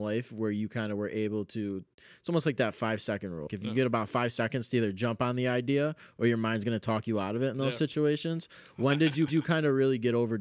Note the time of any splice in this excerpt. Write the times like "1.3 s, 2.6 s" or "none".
3.5 s, 9.3 s